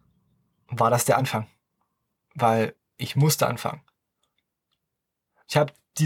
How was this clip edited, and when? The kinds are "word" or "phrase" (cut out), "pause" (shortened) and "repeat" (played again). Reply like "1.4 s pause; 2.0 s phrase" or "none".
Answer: none